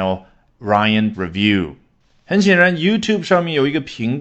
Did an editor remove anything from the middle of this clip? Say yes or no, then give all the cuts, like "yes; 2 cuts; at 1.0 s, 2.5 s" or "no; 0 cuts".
yes; 1 cut; at 1.1 s